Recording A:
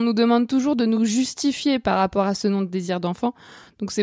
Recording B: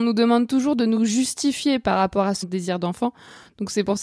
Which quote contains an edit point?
B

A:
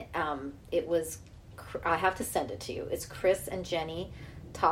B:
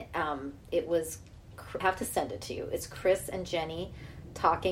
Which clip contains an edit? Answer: B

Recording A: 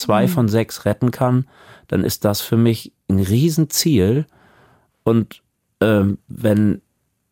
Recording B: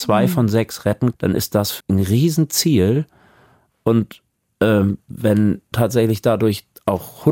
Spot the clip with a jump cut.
B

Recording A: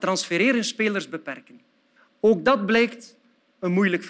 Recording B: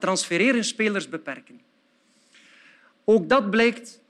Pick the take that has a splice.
A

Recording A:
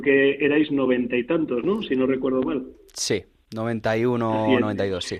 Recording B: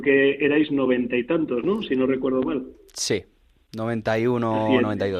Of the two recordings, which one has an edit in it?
A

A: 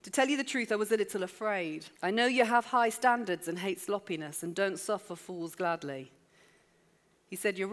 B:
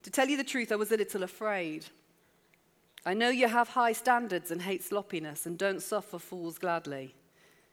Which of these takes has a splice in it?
A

